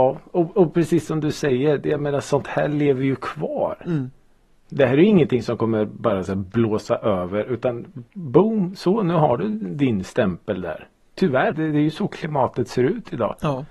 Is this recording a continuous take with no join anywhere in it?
no; 1 cut; at 11.5 s

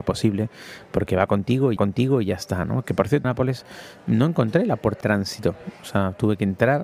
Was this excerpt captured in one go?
no; 3 cuts; at 1.8 s, 3.2 s, 5.0 s

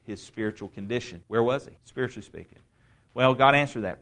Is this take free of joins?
no; 2 cuts; at 1.2 s, 1.8 s

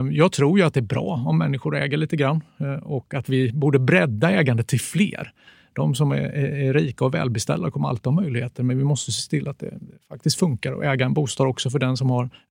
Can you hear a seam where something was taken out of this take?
no; 0 cuts

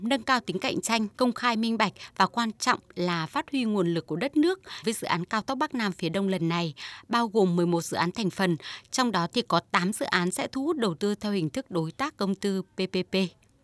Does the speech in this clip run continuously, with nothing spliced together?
no; 2 cuts; at 1.1 s, 4.8 s

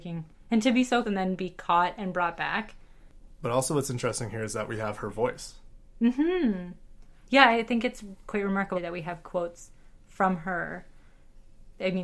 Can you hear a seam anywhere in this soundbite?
yes; 2 cuts; at 1.0 s, 8.7 s

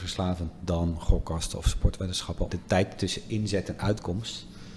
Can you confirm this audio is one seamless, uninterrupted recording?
no; 1 cut; at 2.5 s

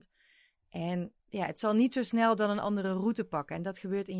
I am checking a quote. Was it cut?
yes; 1 cut; at 1.2 s

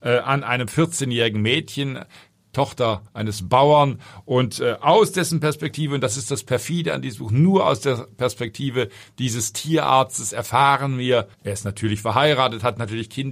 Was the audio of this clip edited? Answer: yes; 2 cuts; at 3.1 s, 11.3 s

